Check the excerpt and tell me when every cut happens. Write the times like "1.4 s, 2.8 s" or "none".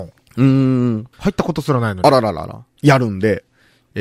1.1 s